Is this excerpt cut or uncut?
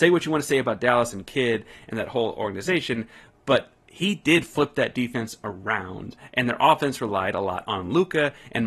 uncut